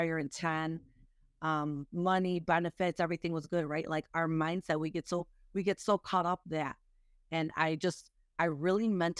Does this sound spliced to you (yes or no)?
yes